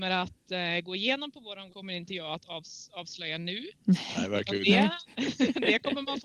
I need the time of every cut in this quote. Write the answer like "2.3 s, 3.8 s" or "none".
1.7 s